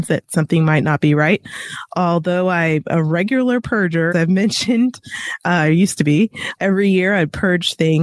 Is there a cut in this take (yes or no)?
yes